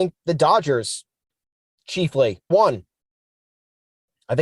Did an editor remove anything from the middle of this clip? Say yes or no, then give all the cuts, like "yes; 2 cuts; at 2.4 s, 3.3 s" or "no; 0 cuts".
yes; 1 cut; at 2.5 s